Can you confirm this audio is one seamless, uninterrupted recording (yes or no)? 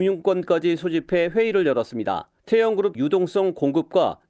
no